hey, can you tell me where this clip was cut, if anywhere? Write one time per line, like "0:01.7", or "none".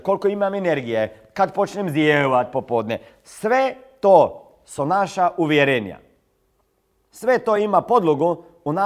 none